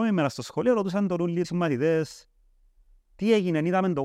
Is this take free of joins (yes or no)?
no